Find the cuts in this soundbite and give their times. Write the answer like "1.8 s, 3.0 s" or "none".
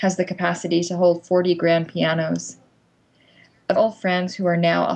3.8 s